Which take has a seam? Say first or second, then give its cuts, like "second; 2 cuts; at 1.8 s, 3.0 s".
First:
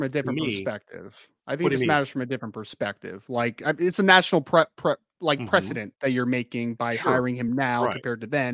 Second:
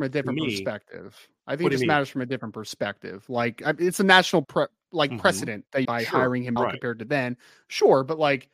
second; 3 cuts; at 4.4 s, 5.8 s, 6.6 s